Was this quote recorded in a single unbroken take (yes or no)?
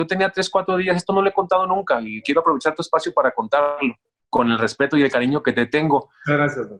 no